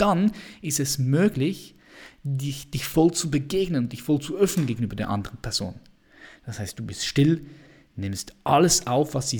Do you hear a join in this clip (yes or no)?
no